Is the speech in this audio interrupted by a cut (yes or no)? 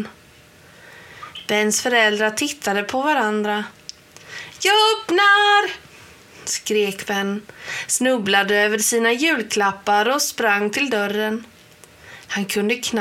no